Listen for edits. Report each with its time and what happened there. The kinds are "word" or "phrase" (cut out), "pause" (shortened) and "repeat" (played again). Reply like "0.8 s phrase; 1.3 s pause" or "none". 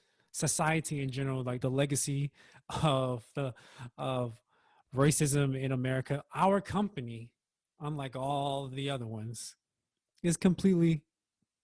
1.6 s word